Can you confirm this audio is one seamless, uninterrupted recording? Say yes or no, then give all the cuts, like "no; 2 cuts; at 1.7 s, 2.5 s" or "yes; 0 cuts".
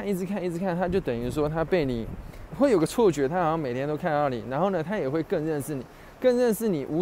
no; 1 cut; at 2.5 s